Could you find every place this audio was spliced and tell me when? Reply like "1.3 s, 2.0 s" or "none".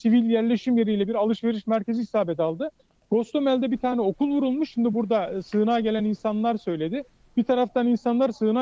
none